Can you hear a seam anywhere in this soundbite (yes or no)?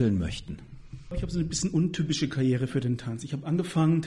yes